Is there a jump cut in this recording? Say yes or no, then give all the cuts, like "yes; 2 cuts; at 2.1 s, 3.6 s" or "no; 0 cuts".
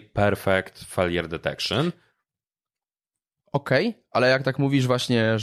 no; 0 cuts